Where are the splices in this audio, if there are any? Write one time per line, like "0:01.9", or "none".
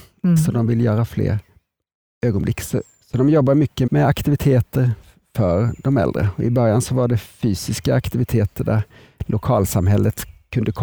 0:03.9